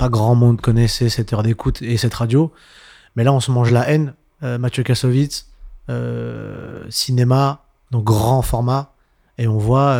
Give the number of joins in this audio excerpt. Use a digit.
0